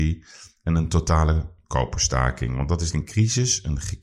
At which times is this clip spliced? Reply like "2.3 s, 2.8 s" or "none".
2.9 s